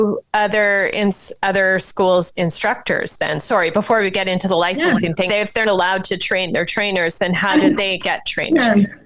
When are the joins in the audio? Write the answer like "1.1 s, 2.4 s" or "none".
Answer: 2.3 s, 5.3 s, 5.6 s